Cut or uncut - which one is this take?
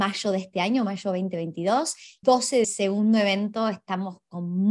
cut